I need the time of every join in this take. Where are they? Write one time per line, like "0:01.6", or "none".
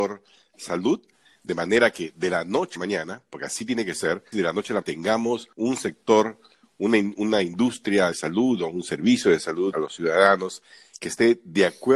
0:02.8
0:04.3
0:04.8
0:05.5
0:08.1
0:09.7